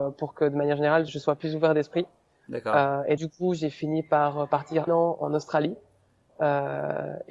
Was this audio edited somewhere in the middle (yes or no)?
yes